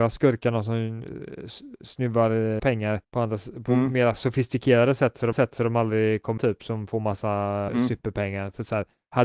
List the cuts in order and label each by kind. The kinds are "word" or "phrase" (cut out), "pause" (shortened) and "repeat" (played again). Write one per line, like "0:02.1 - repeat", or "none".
0:02.6 - word
0:03.0 - pause
0:05.3 - repeat
0:06.4 - word
0:07.7 - word